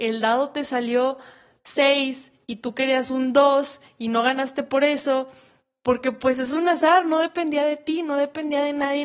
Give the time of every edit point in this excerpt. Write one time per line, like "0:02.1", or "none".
none

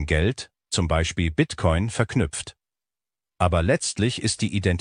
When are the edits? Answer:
none

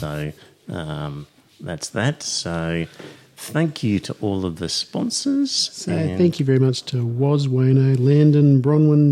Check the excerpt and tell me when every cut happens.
none

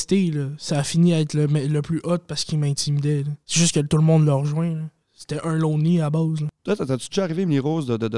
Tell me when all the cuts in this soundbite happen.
0:03.4
0:06.6

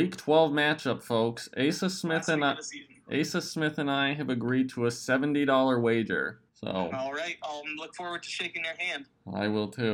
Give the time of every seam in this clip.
0:06.5

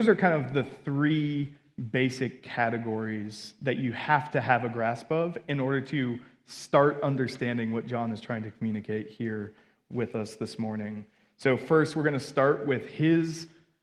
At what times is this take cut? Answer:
none

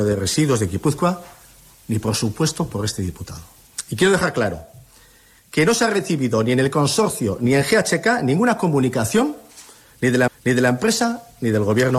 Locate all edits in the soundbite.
0:10.3

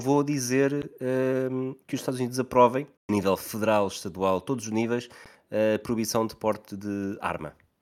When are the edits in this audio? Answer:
0:03.0

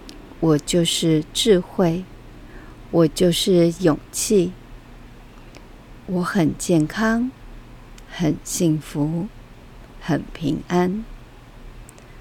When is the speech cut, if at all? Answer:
0:06.0

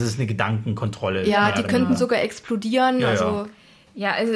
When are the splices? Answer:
none

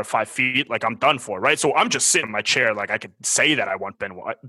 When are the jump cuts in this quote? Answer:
0:02.2

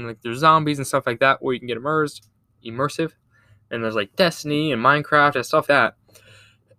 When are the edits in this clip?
0:05.7

